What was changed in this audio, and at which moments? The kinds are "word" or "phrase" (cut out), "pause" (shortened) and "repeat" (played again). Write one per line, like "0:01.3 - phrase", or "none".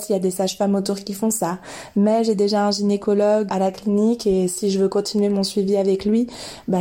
0:03.5 - word